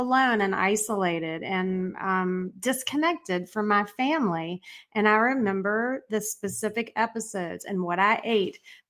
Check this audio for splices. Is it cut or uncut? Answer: uncut